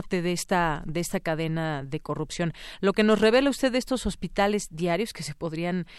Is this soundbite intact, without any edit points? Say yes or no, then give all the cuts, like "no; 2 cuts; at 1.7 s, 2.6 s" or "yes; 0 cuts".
yes; 0 cuts